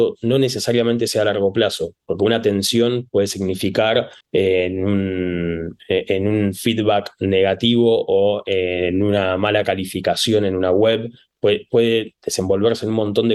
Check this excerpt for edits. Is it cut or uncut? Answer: cut